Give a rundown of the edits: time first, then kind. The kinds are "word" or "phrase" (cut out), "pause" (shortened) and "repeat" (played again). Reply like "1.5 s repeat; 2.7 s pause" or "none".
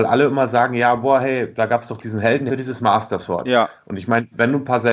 2.5 s word